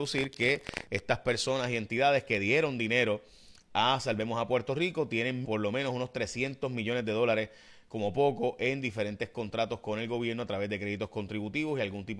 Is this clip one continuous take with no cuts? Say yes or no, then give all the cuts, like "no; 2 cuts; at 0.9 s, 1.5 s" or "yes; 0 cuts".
no; 1 cut; at 5.4 s